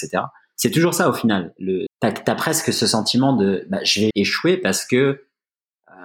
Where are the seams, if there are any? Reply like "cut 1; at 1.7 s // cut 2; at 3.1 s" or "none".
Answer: cut 1; at 1.9 s // cut 2; at 4.1 s